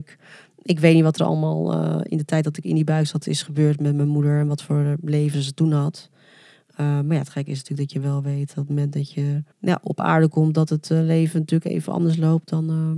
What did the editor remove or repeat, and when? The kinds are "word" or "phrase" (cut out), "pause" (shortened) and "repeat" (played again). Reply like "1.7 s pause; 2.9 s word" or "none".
9.5 s pause